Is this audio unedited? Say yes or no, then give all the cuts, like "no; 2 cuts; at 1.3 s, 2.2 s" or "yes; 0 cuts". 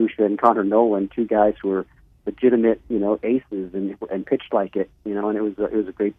yes; 0 cuts